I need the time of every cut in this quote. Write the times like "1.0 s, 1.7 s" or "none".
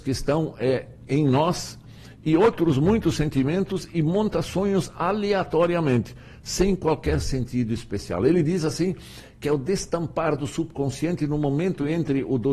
none